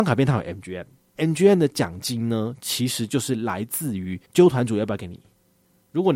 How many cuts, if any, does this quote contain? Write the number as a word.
two